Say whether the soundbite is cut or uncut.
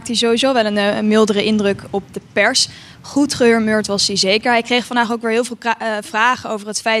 uncut